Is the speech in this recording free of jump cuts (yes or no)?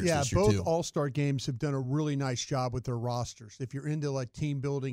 yes